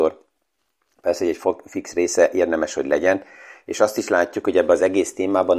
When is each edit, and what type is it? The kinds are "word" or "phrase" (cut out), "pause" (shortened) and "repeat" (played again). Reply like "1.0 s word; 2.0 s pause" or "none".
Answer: none